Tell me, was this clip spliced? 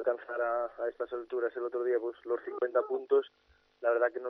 no; 0 cuts

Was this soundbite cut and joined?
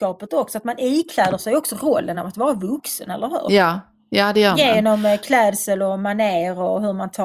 no; 0 cuts

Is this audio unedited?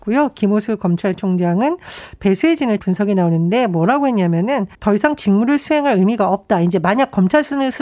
no; 2 cuts; at 2.8 s, 4.7 s

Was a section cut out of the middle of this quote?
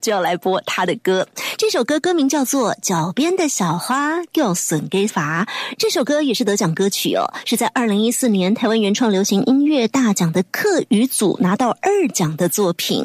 yes; 1 cut; at 5.1 s

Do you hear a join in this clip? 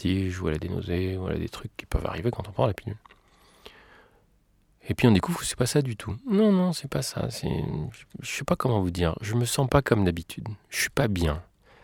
no; 0 cuts

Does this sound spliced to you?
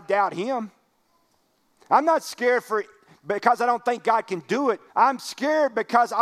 yes; 1 cut; at 4.9 s

